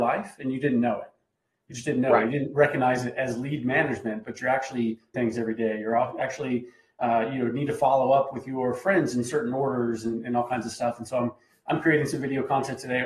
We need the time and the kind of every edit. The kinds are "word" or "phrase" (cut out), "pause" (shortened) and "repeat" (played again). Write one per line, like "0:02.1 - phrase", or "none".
0:05.1 - word